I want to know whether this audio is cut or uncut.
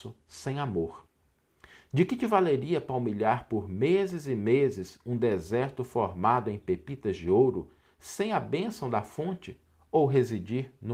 uncut